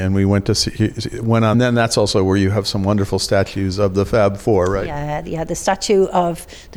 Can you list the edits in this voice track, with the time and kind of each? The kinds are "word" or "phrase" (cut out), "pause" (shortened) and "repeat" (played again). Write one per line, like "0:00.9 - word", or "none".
0:01.5 - phrase